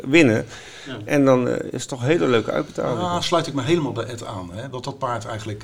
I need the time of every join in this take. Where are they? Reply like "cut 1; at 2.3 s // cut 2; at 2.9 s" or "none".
none